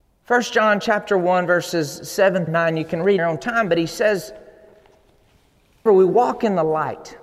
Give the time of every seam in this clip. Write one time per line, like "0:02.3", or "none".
0:02.5
0:03.2
0:05.9